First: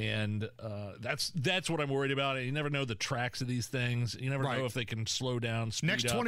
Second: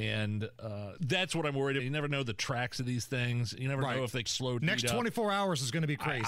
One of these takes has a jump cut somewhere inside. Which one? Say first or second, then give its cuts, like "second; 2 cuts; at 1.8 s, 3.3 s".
second; 4 cuts; at 1.0 s, 1.8 s, 4.2 s, 4.6 s